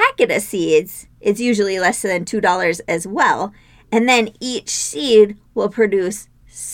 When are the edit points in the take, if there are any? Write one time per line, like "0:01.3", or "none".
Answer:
none